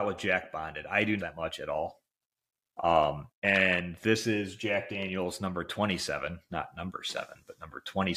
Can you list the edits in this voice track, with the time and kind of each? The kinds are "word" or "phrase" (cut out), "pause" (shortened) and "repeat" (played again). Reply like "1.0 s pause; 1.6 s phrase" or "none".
1.2 s phrase; 3.4 s pause